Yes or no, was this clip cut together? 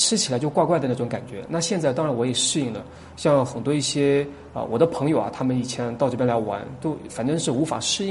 yes